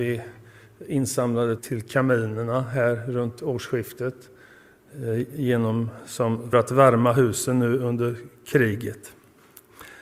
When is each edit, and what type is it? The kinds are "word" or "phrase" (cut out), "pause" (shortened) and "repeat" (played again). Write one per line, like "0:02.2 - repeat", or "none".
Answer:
0:01.6 - word
0:06.5 - word